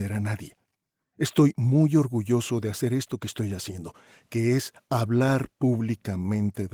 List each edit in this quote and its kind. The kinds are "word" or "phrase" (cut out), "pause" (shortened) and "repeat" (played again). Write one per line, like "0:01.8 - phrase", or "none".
none